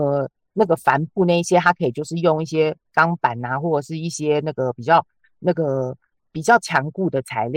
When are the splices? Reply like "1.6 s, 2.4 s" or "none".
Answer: none